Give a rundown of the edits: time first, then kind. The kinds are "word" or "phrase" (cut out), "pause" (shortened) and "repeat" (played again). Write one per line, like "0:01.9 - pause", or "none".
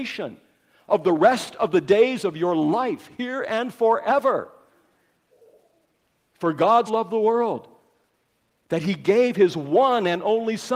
0:06.9 - word